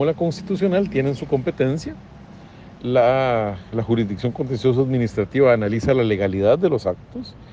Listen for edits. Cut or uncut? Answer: uncut